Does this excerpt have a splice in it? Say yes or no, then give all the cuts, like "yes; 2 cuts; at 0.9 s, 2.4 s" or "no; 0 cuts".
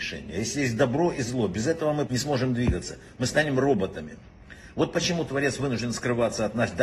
yes; 1 cut; at 2.1 s